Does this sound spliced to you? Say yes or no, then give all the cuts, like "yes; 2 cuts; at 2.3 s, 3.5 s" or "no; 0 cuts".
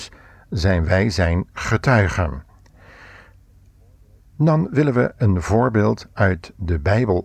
no; 0 cuts